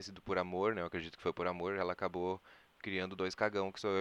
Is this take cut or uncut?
uncut